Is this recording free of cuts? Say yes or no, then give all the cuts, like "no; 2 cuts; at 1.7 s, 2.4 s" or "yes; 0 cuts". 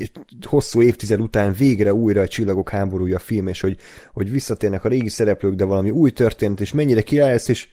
yes; 0 cuts